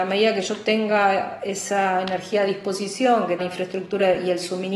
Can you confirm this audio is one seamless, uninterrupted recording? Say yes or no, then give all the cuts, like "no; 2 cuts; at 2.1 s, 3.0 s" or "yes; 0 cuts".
no; 1 cut; at 3.4 s